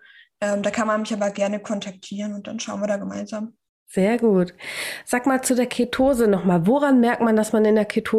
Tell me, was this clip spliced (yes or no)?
no